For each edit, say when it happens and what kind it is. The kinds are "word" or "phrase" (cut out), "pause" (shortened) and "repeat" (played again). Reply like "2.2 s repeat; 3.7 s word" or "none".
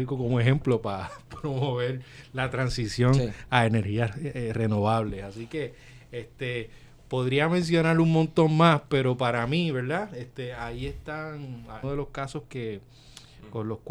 11.8 s word